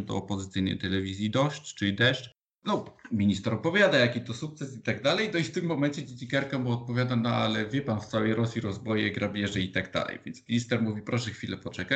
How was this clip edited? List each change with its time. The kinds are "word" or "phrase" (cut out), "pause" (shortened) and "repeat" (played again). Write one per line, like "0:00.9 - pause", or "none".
none